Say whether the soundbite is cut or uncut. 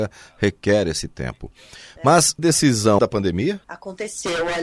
cut